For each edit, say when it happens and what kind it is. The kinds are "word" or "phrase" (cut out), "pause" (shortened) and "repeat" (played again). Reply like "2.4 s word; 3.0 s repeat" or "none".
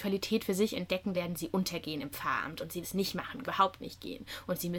1.1 s word; 2.8 s word; 3.4 s phrase